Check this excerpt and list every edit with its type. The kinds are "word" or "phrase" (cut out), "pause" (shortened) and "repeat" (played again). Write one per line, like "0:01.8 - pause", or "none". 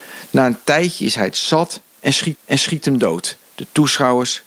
0:02.3 - repeat